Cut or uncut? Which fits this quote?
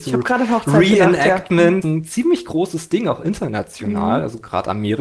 cut